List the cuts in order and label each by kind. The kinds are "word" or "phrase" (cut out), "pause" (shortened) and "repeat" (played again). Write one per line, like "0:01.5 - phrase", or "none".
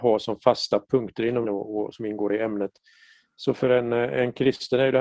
0:01.4 - word